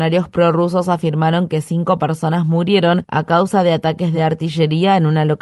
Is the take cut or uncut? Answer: uncut